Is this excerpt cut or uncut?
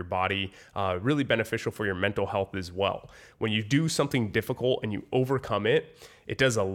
uncut